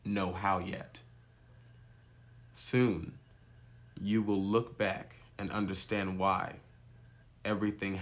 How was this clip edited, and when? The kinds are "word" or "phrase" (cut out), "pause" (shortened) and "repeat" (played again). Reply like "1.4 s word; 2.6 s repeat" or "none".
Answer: none